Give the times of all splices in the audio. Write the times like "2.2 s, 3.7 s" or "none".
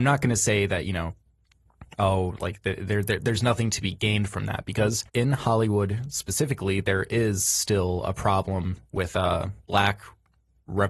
5.1 s

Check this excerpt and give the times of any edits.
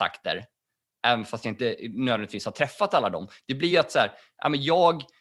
none

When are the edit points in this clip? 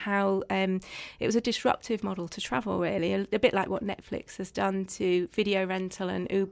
none

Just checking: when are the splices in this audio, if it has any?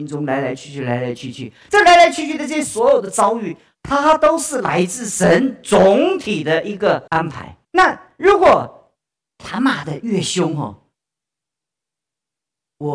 7.1 s, 7.6 s, 9.2 s

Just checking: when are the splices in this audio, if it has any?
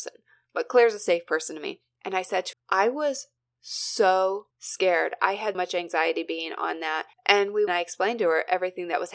2.5 s, 4.5 s, 5.5 s, 7.1 s, 7.7 s

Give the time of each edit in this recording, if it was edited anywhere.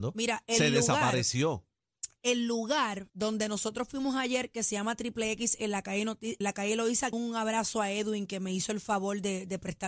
3.1 s, 6.4 s, 7.1 s

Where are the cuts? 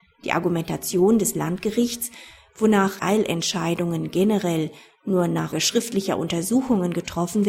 3.0 s, 5.5 s

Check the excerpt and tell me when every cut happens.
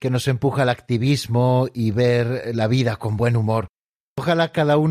none

